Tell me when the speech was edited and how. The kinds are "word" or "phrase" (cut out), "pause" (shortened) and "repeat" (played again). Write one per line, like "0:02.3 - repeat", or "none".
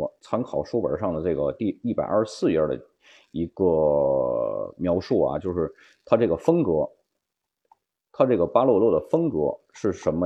none